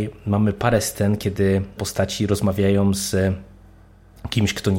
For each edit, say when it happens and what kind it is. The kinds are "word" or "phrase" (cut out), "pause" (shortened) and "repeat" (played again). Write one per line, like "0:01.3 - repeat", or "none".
0:01.8 - word